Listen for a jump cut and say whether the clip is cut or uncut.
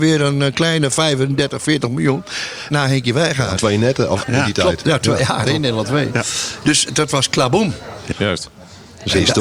cut